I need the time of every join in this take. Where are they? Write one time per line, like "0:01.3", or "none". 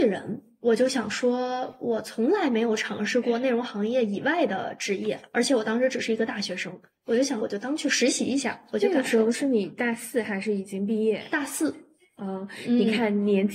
none